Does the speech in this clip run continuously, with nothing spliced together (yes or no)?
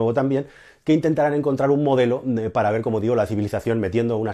yes